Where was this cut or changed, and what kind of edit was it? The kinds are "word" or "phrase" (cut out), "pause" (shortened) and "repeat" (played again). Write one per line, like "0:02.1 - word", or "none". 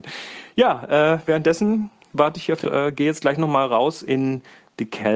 0:02.6 - phrase